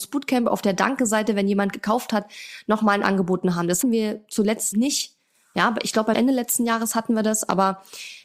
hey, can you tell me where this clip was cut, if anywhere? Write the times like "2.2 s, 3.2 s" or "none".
3.0 s, 3.8 s, 4.7 s, 6.1 s